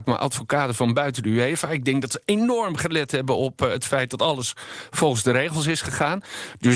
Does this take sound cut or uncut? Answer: uncut